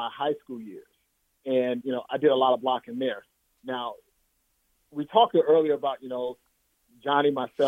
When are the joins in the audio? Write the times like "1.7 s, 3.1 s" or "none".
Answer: 1.8 s